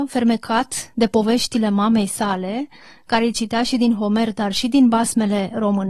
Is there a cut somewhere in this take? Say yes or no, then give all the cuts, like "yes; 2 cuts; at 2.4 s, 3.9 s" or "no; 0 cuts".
no; 0 cuts